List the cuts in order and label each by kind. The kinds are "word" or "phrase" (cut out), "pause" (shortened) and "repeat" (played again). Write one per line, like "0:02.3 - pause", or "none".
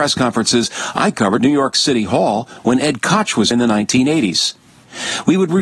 0:01.4 - word
0:03.5 - word

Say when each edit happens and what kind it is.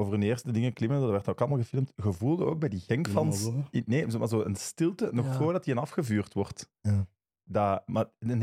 none

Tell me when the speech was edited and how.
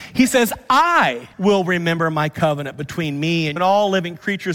0:01.3 - pause
0:03.6 - word

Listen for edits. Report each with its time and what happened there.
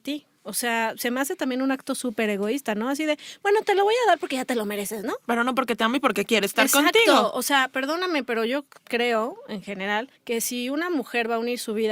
0:10.2 - pause

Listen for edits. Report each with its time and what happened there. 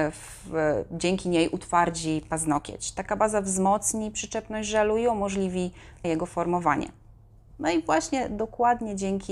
0:06.0 - word

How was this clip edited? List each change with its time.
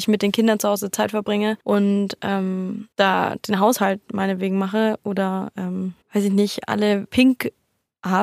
0:01.6 - pause
0:02.9 - pause
0:06.0 - pause
0:07.1 - word

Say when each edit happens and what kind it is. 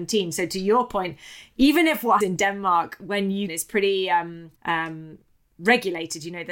0:02.2 - word
0:03.5 - phrase
0:04.6 - pause

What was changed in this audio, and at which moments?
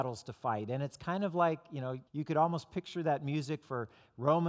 0:02.1 - pause

